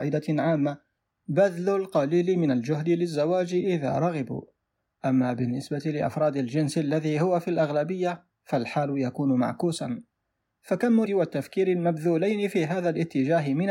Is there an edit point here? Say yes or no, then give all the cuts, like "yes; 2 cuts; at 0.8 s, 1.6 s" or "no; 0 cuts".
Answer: yes; 1 cut; at 11.1 s